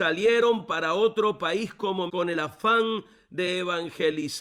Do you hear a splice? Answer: yes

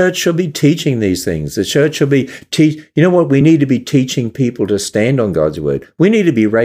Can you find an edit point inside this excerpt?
no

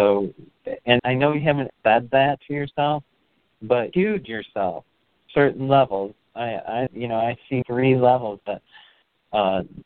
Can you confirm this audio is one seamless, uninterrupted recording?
no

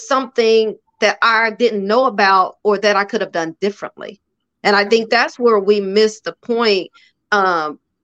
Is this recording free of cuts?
yes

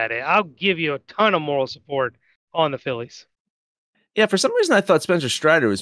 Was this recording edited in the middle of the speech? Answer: no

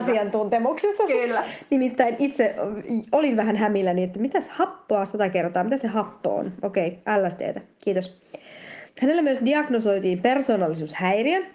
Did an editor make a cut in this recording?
yes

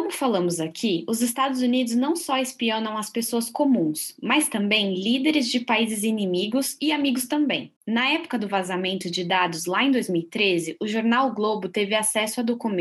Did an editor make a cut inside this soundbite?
yes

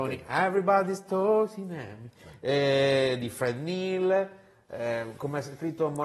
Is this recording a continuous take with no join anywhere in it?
yes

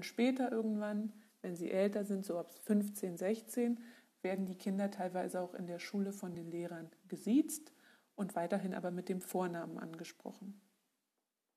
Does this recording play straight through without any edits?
yes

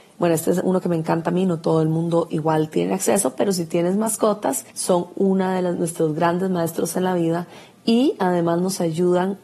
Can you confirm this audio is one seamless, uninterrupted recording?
no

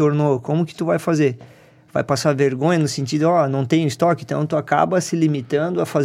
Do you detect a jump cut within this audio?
no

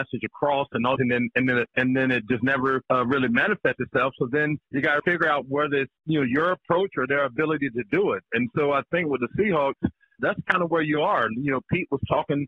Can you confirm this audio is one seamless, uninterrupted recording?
no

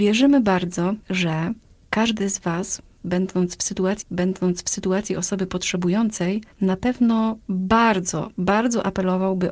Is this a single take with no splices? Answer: no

